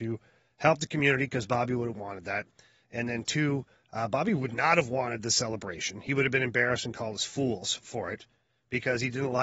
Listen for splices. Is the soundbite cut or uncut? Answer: uncut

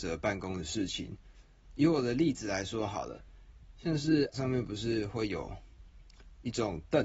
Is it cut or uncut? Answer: cut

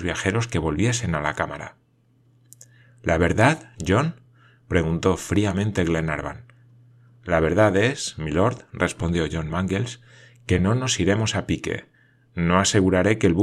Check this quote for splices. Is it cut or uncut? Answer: uncut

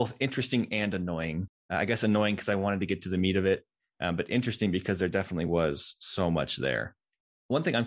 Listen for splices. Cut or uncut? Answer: uncut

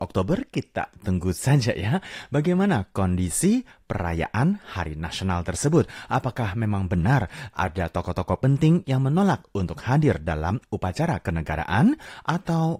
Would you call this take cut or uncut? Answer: uncut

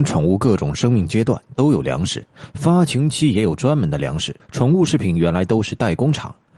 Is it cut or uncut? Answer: cut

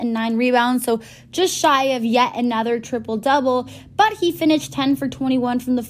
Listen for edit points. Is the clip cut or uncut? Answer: uncut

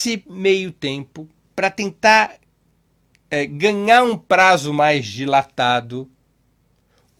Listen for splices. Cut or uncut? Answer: uncut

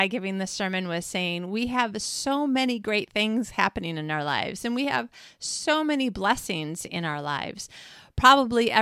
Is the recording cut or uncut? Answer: uncut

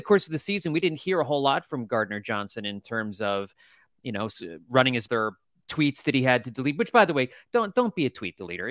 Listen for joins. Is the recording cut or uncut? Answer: cut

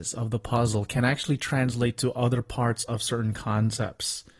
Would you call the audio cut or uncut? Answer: uncut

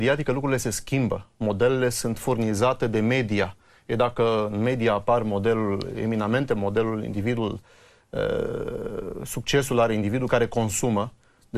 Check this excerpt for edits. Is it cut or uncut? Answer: uncut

